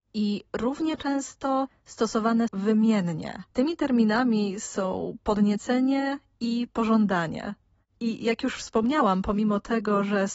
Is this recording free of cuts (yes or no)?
no